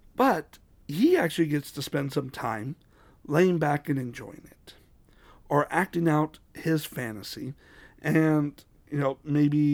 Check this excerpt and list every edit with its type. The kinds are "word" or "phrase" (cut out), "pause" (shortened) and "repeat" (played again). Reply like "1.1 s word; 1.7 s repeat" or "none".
none